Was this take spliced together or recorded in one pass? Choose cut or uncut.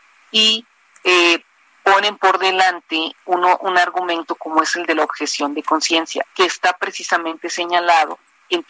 uncut